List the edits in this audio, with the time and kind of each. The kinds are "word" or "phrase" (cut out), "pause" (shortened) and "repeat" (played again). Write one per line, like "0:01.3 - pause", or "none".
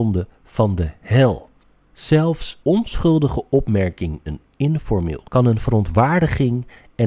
0:02.6 - word
0:04.3 - word
0:05.2 - word

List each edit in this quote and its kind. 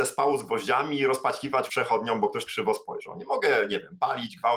0:01.7 - word
0:02.5 - phrase

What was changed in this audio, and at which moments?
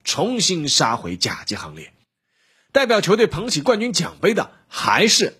none

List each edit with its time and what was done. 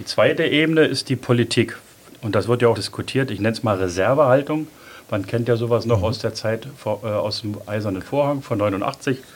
0:02.8 - word

